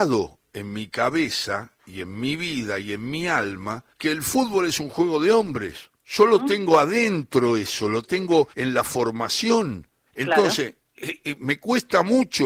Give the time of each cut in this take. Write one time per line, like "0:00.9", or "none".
0:03.9
0:06.0
0:08.5
0:10.1